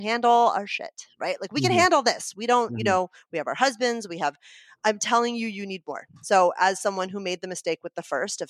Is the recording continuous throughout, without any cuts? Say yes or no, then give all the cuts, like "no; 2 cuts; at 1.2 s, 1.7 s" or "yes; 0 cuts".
yes; 0 cuts